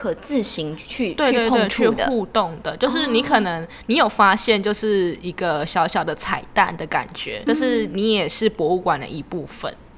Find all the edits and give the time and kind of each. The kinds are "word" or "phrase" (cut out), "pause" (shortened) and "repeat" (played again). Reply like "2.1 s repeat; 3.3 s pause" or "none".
7.5 s word